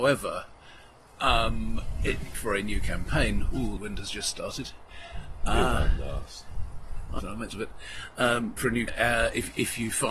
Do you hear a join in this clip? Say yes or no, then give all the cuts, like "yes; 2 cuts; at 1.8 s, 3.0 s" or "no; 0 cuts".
yes; 6 cuts; at 2.3 s, 3.8 s, 7.2 s, 7.5 s, 8.6 s, 8.9 s